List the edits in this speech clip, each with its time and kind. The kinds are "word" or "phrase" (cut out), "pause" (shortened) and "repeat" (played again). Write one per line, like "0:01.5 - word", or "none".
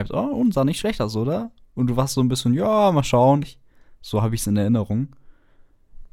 0:03.4 - word